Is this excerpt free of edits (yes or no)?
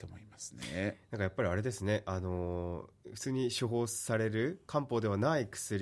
no